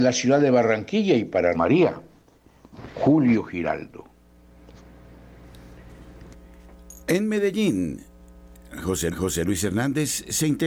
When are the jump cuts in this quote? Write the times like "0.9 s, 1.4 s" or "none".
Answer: 1.5 s, 7.0 s, 9.1 s